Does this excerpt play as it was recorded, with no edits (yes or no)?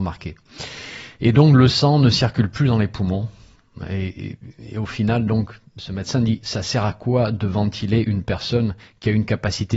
yes